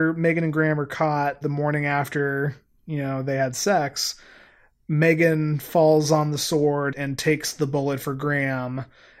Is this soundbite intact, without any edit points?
no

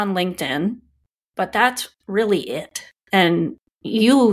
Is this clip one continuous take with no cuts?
yes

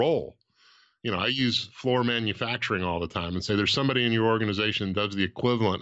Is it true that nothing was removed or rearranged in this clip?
yes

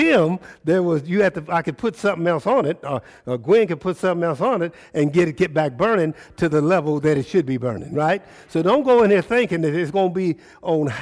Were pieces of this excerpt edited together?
no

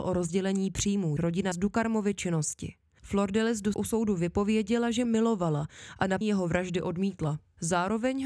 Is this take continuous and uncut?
no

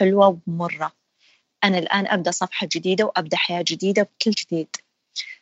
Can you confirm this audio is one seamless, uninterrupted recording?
no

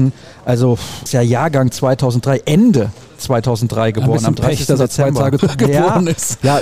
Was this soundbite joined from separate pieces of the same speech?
yes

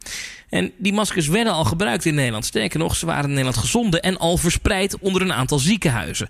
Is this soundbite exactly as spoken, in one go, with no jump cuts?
yes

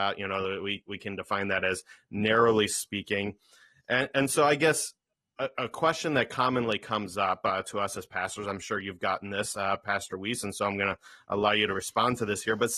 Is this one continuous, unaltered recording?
yes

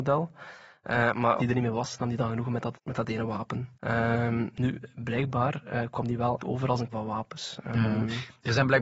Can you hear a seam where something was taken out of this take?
yes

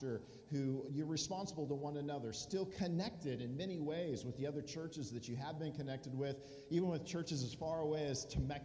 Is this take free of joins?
yes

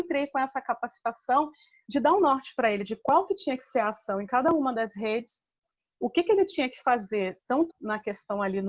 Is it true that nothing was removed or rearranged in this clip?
no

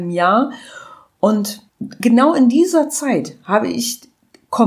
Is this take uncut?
no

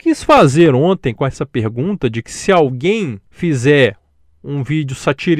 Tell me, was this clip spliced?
yes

